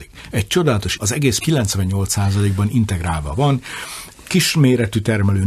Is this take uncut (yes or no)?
no